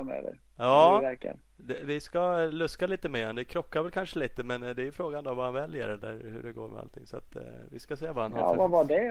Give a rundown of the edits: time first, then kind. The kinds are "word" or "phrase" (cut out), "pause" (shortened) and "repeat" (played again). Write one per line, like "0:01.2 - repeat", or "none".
none